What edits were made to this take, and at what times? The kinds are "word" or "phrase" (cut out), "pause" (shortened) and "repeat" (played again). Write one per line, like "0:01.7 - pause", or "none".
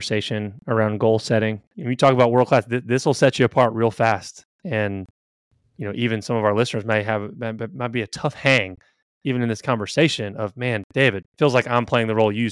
0:11.3 - pause